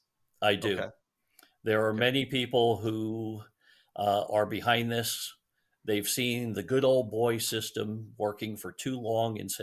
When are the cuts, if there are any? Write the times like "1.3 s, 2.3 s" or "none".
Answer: none